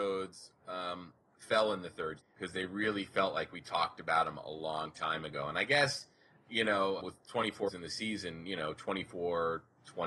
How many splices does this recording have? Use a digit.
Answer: 3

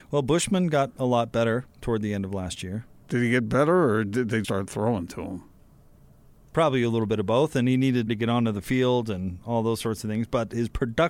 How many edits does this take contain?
3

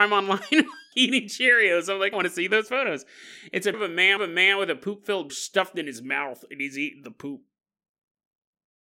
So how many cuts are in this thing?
5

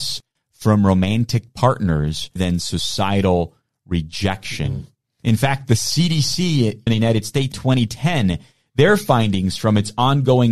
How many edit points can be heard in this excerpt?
3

